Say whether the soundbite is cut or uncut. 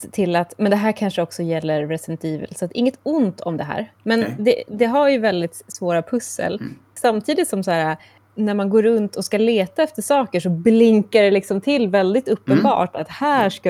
uncut